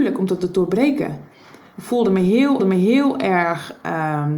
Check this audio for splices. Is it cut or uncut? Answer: cut